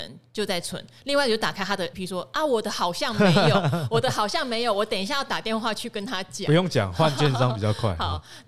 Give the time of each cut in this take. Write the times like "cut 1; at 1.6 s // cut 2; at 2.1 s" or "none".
cut 1; at 1.9 s